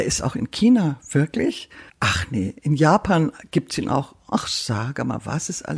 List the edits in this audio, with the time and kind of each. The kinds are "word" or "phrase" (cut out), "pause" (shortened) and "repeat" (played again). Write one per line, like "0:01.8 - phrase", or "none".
0:01.9 - pause